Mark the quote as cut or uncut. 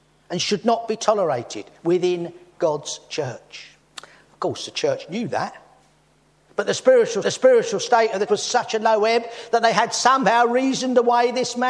cut